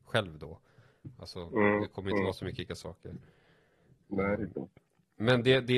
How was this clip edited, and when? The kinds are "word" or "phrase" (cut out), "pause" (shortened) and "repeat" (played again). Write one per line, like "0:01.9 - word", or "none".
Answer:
0:02.7 - word
0:04.4 - word